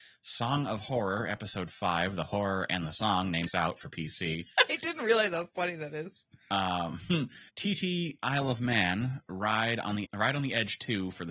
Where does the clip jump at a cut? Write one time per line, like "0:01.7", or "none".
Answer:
0:03.5
0:07.5
0:10.0